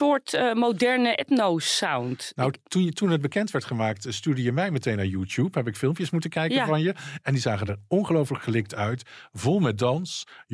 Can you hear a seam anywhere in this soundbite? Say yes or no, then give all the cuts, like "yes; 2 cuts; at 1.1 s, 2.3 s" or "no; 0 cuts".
no; 0 cuts